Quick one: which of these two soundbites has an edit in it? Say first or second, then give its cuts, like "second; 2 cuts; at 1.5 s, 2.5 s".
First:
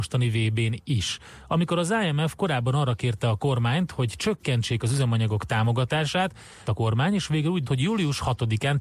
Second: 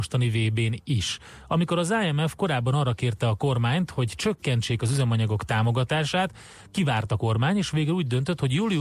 first; 2 cuts; at 6.7 s, 7.7 s